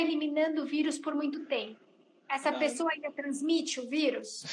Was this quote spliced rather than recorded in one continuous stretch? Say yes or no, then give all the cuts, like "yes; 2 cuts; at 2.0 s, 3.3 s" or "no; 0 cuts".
no; 0 cuts